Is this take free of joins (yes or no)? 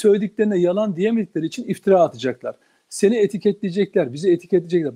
yes